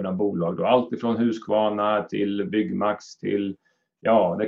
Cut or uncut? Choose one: uncut